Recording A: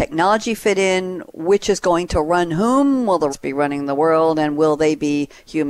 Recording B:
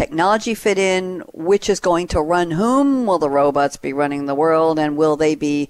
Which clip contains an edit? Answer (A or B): A